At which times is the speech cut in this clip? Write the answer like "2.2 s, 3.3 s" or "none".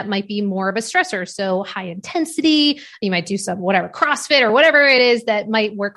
none